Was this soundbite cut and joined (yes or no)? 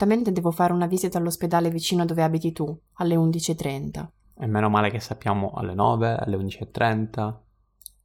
no